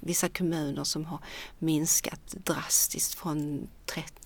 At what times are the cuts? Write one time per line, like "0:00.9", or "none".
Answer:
none